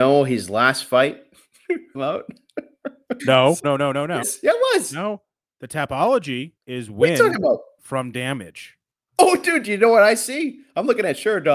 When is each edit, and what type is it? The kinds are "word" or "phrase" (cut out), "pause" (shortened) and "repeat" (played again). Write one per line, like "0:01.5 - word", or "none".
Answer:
0:01.9 - phrase
0:03.2 - word
0:03.6 - word
0:04.2 - word
0:06.6 - pause
0:07.8 - word